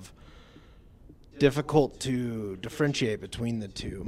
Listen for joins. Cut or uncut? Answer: uncut